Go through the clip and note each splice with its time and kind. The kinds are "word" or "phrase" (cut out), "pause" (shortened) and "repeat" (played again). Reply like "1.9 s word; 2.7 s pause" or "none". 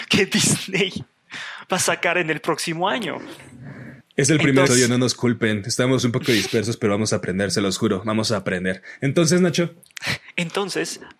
4.0 s pause; 4.7 s word